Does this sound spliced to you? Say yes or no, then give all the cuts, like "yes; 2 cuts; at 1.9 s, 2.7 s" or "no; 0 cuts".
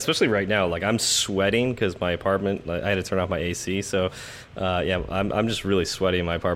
no; 0 cuts